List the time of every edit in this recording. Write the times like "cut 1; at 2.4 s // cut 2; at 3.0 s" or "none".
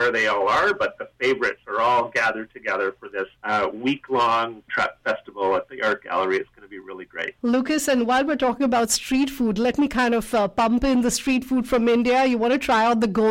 cut 1; at 3.4 s // cut 2; at 4.7 s // cut 3; at 7.4 s